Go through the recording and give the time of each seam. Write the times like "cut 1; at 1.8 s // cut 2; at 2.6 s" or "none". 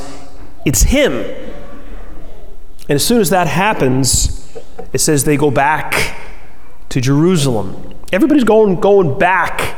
none

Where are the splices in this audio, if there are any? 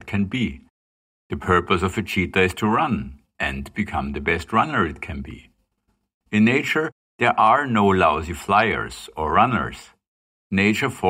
none

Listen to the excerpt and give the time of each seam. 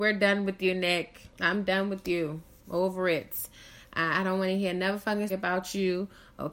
cut 1; at 1.3 s // cut 2; at 5.3 s

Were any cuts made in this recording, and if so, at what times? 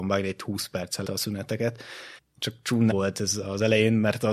cut 1; at 1.0 s // cut 2; at 2.2 s // cut 3; at 2.9 s

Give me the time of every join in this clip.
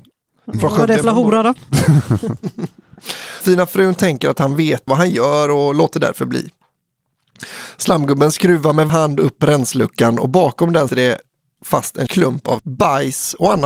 cut 1; at 1.0 s // cut 2; at 3.4 s // cut 3; at 4.9 s // cut 4; at 8.9 s // cut 5; at 10.9 s // cut 6; at 12.1 s // cut 7; at 12.6 s

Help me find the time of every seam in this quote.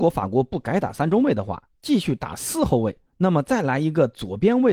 cut 1; at 3.1 s

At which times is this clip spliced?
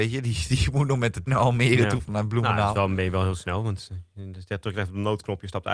cut 1; at 1.3 s

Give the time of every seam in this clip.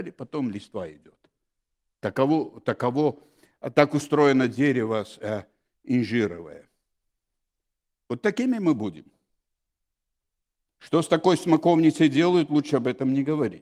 none

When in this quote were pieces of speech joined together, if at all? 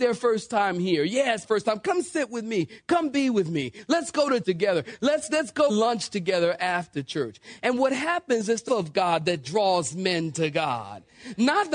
cut 1; at 1.4 s // cut 2; at 4.4 s // cut 3; at 5.7 s // cut 4; at 8.7 s

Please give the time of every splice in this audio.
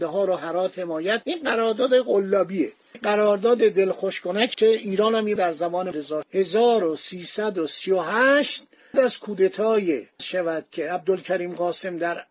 cut 1; at 1.2 s // cut 2; at 2.9 s // cut 3; at 4.5 s // cut 4; at 5.4 s // cut 5; at 5.9 s // cut 6; at 6.2 s // cut 7; at 8.9 s // cut 8; at 10.2 s

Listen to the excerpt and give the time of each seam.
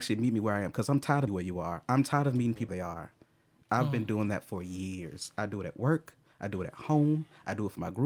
cut 1; at 1.3 s // cut 2; at 2.7 s

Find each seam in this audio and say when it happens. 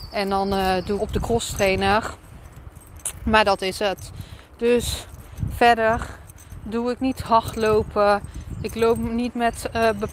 cut 1; at 1.0 s

